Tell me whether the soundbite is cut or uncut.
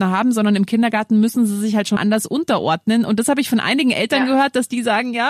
cut